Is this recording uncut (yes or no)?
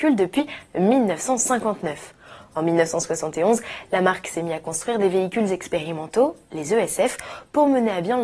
yes